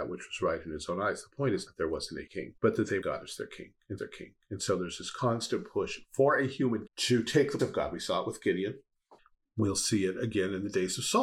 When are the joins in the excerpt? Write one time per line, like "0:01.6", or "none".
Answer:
0:01.7
0:02.3
0:02.6
0:03.0
0:04.0
0:06.9
0:07.6
0:09.2